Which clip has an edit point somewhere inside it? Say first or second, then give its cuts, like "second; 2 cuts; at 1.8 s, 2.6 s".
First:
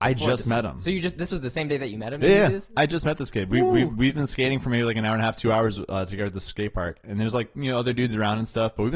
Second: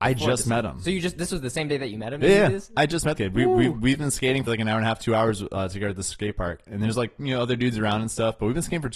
second; 2 cuts; at 3.2 s, 4.5 s